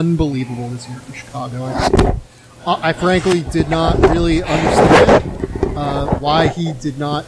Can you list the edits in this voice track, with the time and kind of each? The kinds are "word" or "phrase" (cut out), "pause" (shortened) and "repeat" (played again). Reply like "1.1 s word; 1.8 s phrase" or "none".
none